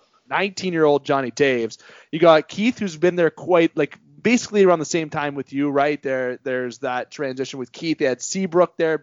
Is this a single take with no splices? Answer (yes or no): yes